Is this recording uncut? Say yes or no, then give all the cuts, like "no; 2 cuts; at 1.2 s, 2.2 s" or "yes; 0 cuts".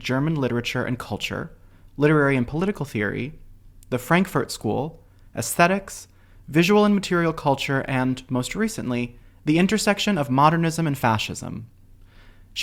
yes; 0 cuts